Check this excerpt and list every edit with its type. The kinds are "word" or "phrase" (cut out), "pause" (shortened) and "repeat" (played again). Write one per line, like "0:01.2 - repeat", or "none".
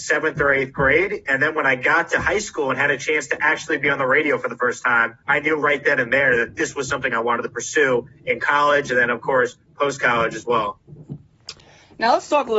0:05.2 - pause